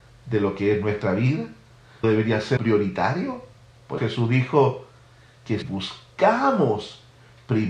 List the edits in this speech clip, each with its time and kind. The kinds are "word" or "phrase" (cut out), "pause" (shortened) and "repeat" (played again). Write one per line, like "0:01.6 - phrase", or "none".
0:02.0 - word
0:02.6 - word
0:04.0 - word
0:05.6 - word